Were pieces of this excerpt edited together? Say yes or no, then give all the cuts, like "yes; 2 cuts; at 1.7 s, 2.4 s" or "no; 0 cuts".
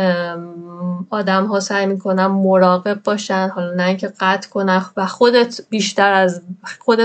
no; 0 cuts